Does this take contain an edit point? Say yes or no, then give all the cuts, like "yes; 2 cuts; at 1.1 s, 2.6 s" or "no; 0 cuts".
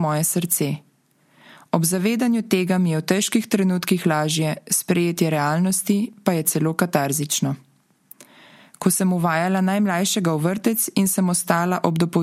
no; 0 cuts